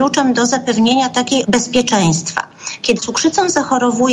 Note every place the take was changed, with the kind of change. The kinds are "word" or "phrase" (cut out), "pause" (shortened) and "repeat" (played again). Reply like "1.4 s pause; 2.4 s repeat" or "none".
1.4 s word; 3.0 s word